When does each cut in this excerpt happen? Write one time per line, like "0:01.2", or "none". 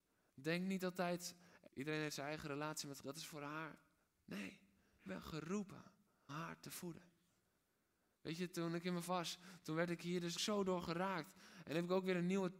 0:01.7
0:03.0
0:05.1
0:06.3
0:09.1
0:10.4